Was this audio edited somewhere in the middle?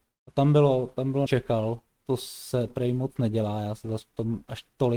yes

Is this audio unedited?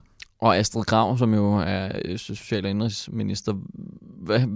yes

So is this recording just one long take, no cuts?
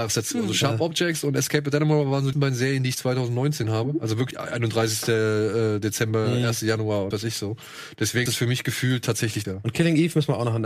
no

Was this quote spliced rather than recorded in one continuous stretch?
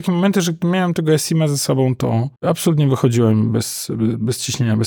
yes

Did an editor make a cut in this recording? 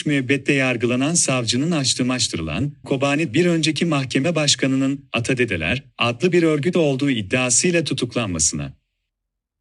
yes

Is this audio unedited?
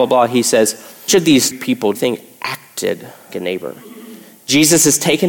no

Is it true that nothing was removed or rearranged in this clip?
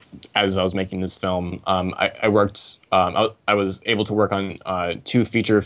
yes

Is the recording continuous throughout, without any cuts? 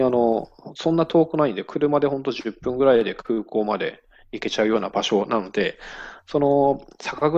yes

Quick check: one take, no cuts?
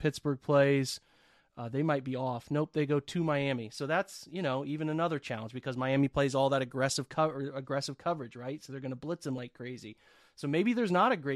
yes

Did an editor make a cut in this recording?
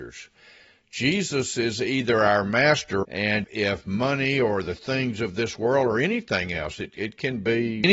yes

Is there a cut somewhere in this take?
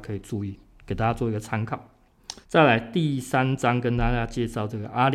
yes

